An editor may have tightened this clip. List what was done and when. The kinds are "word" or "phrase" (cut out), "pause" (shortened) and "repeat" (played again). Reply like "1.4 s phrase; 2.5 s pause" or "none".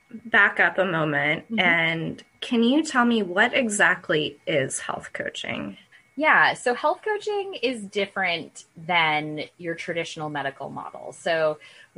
5.9 s pause